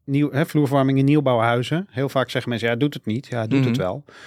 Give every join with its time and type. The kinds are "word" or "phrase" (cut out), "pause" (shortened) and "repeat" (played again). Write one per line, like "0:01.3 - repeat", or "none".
none